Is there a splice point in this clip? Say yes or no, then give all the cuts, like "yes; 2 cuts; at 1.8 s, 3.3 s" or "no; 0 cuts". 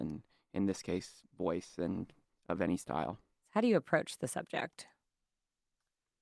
no; 0 cuts